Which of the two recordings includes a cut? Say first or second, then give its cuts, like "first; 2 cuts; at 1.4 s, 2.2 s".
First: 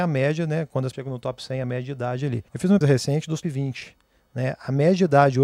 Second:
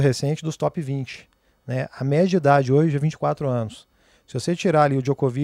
first; 4 cuts; at 0.9 s, 2.5 s, 2.8 s, 3.4 s